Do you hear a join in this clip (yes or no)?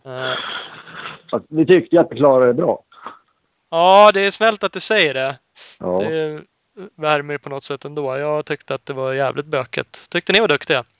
no